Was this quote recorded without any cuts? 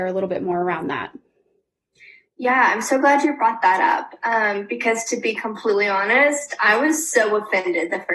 yes; 0 cuts

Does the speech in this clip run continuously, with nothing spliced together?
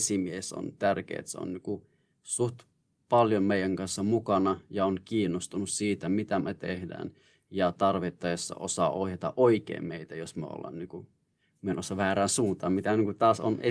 yes; 0 cuts

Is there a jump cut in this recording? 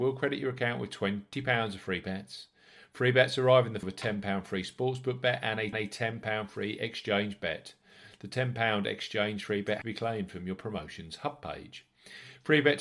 yes; 3 cuts; at 3.8 s, 5.7 s, 9.8 s

